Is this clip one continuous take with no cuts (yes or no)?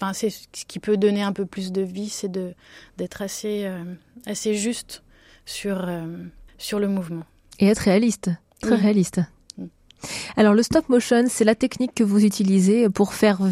no